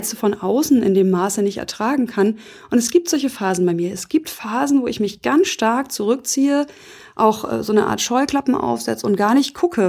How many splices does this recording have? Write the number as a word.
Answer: zero